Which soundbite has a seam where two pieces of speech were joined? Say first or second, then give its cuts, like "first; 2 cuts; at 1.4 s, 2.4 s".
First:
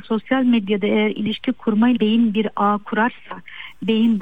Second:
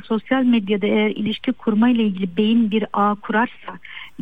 first; 1 cut; at 2.0 s